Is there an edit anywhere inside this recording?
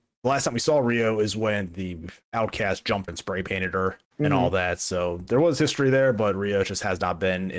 yes; 2 cuts; at 3.1 s, 4.0 s

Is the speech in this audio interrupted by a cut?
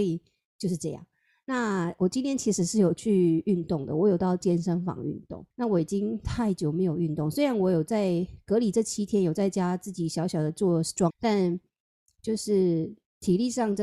yes; 2 cuts; at 5.5 s, 11.1 s

